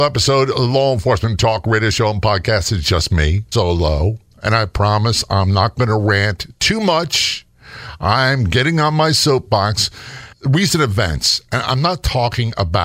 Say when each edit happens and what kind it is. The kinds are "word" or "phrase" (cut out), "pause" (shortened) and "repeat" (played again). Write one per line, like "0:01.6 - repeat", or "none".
0:03.5 - word